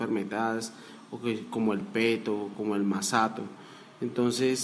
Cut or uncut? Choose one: uncut